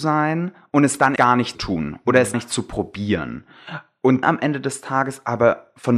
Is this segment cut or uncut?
cut